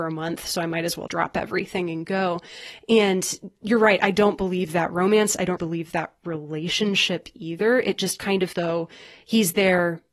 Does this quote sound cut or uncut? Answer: cut